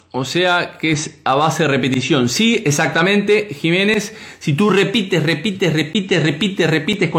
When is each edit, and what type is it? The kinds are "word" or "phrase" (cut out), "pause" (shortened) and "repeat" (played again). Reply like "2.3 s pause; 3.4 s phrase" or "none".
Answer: none